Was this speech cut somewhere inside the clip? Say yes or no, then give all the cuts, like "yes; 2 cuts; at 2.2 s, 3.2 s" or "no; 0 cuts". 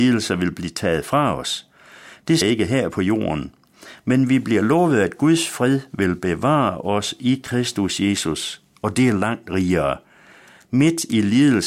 yes; 1 cut; at 2.4 s